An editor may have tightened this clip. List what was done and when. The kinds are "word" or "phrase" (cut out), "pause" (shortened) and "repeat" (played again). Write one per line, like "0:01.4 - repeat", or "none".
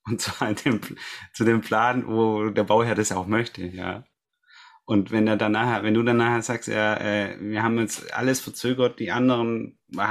none